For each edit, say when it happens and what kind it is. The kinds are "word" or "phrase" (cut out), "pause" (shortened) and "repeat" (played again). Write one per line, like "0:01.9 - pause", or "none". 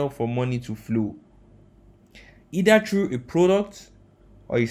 none